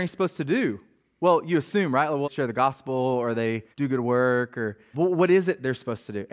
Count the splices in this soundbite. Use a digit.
3